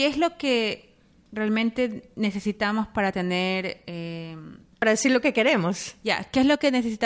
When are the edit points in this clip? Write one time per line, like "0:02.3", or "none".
none